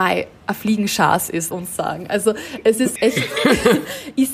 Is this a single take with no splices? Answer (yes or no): no